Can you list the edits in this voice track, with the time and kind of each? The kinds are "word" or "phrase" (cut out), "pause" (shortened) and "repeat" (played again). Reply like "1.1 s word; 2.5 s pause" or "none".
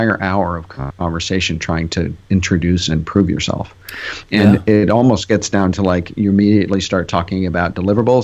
2.2 s pause